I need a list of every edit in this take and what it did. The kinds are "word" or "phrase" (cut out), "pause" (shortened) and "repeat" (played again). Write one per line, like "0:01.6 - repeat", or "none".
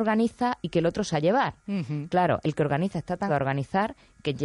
0:01.1 - word
0:02.4 - word
0:03.3 - word